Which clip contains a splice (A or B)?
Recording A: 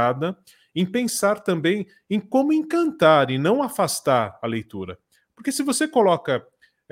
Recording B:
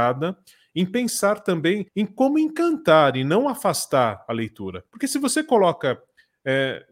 B